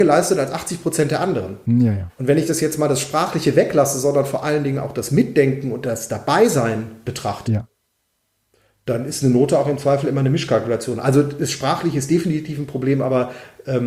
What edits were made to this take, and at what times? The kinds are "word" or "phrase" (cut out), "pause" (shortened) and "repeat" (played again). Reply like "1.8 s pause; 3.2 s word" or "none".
none